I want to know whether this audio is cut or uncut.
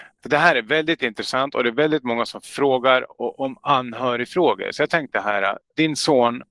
cut